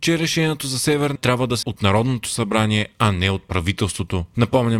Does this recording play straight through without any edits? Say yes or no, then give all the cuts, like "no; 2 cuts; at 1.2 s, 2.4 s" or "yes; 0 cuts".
no; 2 cuts; at 1.2 s, 1.6 s